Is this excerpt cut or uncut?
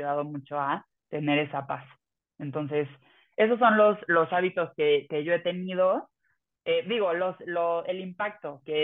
uncut